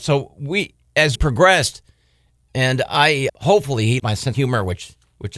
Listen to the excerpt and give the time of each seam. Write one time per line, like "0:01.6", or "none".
0:01.2
0:03.3
0:04.0
0:04.3